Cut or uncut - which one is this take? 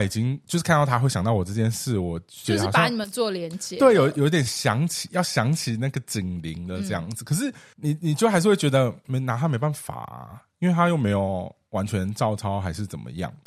uncut